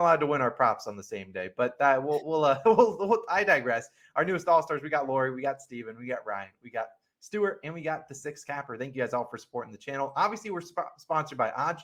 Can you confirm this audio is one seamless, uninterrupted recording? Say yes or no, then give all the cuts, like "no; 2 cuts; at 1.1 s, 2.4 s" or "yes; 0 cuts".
yes; 0 cuts